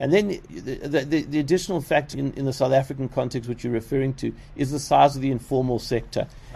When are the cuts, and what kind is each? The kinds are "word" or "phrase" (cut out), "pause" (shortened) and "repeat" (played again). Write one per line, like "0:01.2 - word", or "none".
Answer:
0:02.1 - word

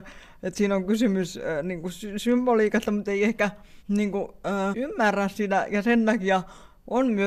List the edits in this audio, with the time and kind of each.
0:03.0 - word
0:03.8 - pause
0:04.7 - word

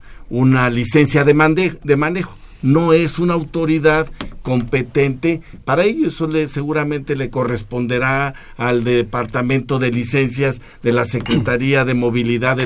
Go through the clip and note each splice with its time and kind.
none

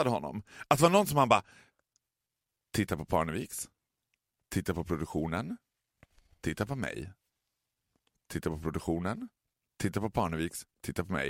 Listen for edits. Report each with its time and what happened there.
none

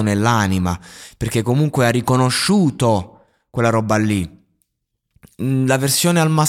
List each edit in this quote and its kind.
none

